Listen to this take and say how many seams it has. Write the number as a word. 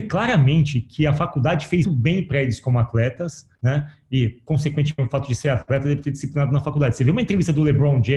three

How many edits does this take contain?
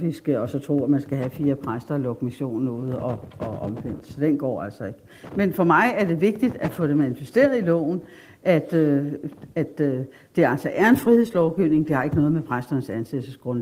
zero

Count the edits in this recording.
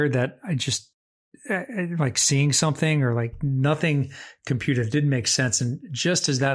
zero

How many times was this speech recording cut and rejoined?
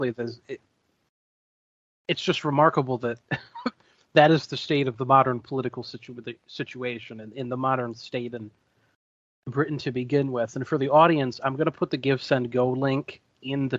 zero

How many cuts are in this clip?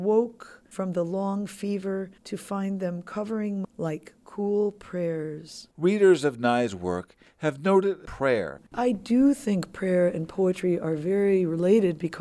five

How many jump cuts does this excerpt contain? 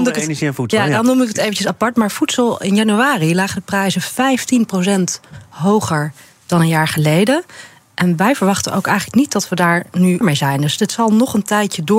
one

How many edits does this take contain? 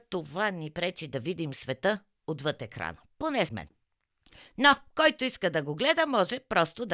one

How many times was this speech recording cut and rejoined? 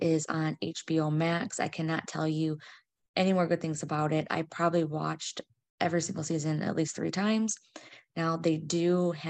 zero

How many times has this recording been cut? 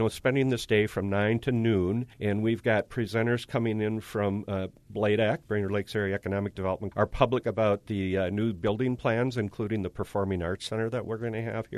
three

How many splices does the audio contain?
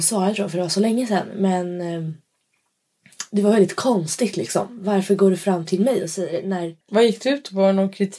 one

